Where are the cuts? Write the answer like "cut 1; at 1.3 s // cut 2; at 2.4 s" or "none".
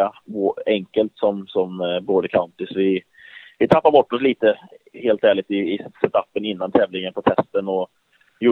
none